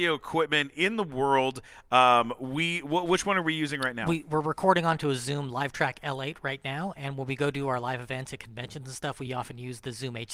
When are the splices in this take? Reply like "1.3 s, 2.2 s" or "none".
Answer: none